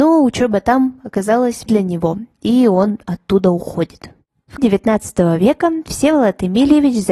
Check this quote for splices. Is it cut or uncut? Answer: cut